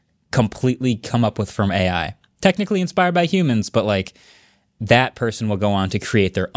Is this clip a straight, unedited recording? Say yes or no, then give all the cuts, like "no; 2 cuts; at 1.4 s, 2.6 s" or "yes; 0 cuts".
yes; 0 cuts